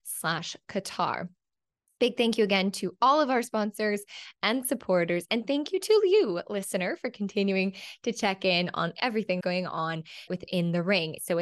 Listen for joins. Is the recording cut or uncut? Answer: cut